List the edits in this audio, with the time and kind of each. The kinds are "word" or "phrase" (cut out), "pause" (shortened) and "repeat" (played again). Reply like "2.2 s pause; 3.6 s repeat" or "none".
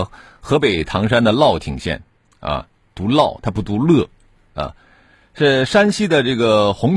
none